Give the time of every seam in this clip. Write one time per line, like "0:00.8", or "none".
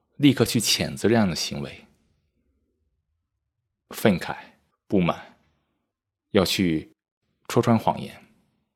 0:04.7

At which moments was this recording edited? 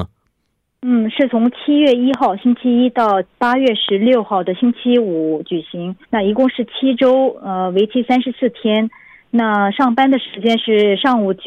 0:03.3
0:06.0

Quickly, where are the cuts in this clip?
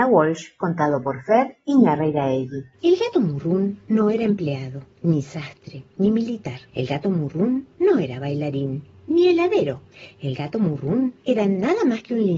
0:02.7
0:06.7
0:11.2

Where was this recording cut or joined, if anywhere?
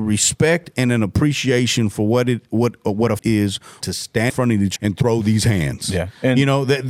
0:03.2
0:03.8
0:04.3
0:04.8

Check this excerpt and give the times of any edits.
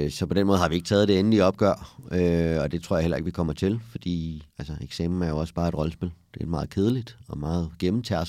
0:04.5

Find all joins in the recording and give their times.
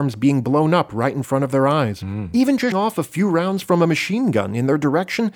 0:02.7

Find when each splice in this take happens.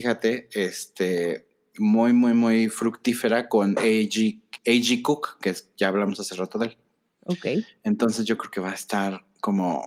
0:04.6

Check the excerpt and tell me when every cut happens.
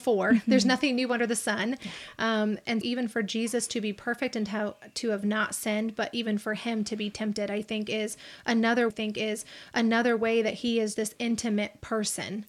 0:02.8
0:08.9
0:10.9

